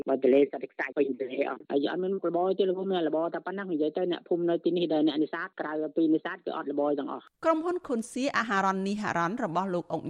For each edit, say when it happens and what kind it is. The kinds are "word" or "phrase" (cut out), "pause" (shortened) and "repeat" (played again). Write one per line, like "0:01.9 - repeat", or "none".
0:07.3 - pause